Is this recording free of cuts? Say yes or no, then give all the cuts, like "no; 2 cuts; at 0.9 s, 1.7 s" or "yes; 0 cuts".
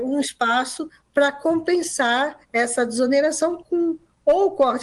no; 1 cut; at 2.4 s